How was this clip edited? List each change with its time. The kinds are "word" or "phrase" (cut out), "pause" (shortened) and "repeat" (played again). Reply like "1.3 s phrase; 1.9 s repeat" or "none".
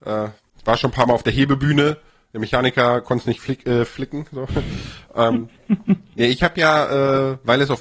none